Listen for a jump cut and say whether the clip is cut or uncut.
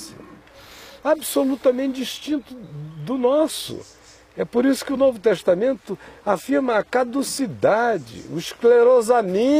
uncut